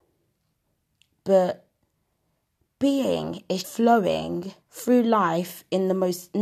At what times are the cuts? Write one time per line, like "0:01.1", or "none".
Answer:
0:03.6
0:04.6